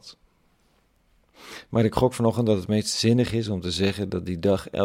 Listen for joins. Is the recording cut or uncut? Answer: uncut